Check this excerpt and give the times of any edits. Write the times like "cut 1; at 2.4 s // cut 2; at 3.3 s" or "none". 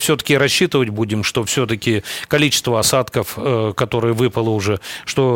none